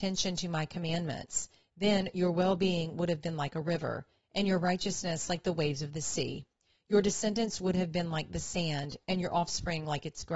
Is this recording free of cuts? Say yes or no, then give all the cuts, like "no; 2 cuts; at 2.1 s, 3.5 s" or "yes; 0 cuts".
yes; 0 cuts